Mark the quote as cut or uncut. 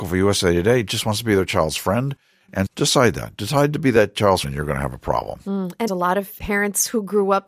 cut